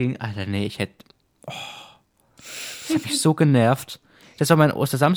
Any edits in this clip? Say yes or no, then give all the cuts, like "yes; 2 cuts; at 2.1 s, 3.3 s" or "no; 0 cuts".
no; 0 cuts